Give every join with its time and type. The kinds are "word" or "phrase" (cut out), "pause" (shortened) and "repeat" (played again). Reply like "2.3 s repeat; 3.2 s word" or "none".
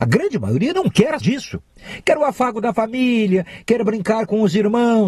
1.2 s word